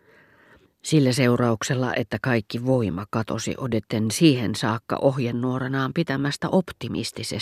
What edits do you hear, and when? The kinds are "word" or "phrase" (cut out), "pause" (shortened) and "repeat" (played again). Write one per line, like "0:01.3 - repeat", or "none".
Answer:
none